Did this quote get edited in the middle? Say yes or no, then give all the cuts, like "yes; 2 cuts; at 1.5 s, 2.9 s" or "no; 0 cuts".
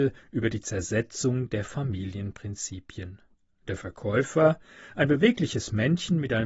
yes; 1 cut; at 3.3 s